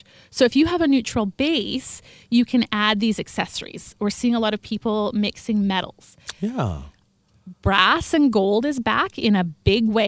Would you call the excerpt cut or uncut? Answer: uncut